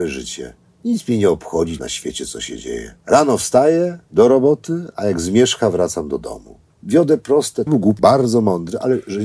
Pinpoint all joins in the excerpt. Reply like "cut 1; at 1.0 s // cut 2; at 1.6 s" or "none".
cut 1; at 1.8 s // cut 2; at 3.0 s // cut 3; at 4.1 s // cut 4; at 7.7 s // cut 5; at 8.0 s